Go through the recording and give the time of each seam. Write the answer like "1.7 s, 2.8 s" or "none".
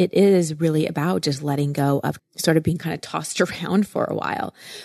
2.2 s